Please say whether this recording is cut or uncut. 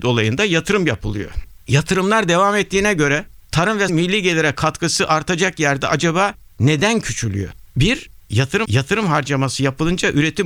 cut